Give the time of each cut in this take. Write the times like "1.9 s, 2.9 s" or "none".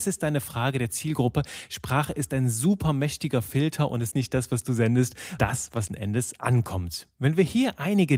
4.1 s, 5.4 s, 5.9 s